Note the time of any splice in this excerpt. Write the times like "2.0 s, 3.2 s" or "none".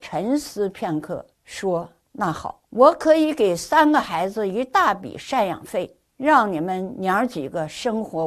1.3 s, 2.6 s, 6.1 s